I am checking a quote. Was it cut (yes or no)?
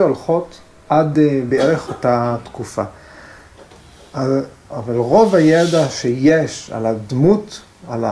no